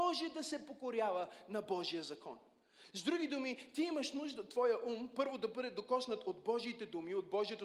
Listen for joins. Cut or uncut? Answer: uncut